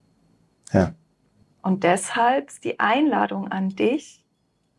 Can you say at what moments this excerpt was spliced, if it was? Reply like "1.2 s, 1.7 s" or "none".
1.4 s